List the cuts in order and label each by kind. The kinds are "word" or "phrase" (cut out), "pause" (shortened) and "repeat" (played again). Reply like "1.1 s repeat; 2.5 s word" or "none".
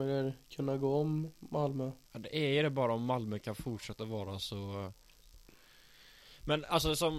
2.0 s pause